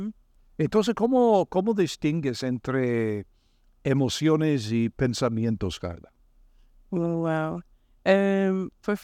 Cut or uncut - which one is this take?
uncut